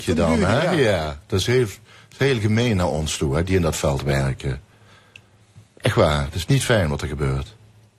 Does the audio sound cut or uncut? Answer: uncut